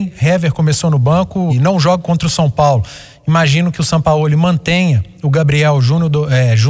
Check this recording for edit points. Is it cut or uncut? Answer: cut